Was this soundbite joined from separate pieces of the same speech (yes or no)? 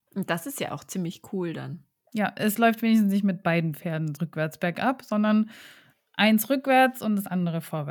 yes